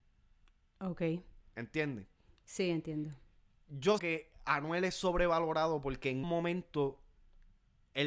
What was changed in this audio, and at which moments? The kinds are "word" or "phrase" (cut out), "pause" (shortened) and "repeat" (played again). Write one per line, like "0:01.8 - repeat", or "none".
0:04.0 - word
0:06.2 - word